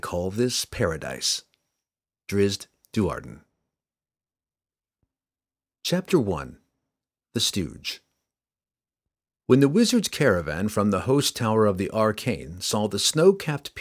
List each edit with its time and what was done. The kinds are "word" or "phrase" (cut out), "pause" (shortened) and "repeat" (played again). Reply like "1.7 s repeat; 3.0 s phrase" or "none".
none

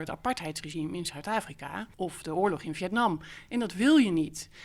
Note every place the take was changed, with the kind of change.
1.9 s pause

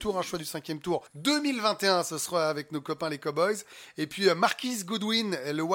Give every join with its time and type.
1.1 s pause

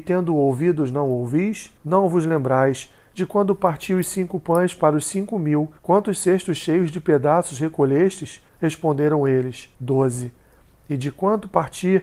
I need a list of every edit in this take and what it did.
1.8 s pause; 5.8 s pause; 8.5 s pause; 9.7 s pause

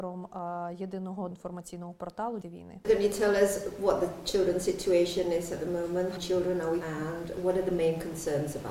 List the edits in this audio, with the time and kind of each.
1.3 s word; 2.4 s word; 2.8 s word; 6.2 s word; 6.8 s word

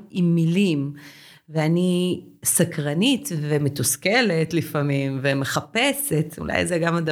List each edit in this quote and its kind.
none

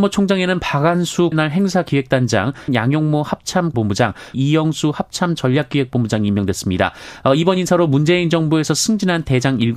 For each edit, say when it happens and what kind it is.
1.3 s word; 2.7 s word; 3.7 s word; 4.3 s word

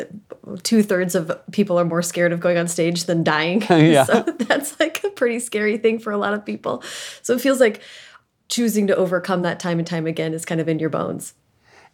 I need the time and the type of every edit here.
none

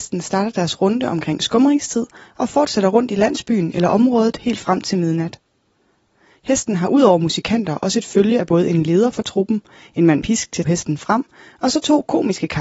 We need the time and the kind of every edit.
10.2 s phrase; 10.6 s word

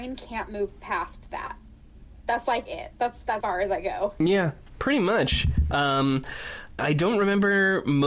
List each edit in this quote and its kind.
3.4 s word; 6.8 s word

